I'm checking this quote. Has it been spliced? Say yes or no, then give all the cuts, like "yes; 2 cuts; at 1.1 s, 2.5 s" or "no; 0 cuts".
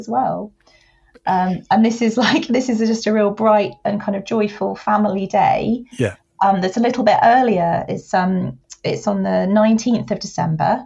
no; 0 cuts